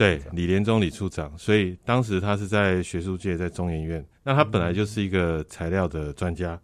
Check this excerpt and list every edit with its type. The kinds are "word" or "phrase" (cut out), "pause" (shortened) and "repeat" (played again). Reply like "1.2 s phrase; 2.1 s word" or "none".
4.1 s pause